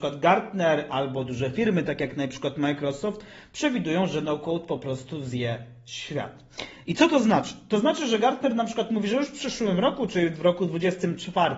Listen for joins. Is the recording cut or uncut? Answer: uncut